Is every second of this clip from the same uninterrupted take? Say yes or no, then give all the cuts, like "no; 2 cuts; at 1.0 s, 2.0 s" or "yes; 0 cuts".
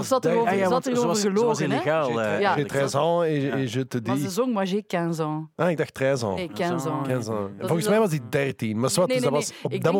yes; 0 cuts